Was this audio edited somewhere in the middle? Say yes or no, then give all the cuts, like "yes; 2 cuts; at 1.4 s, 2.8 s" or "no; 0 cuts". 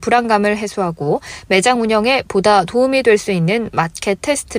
no; 0 cuts